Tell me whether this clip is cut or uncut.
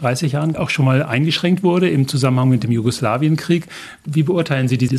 uncut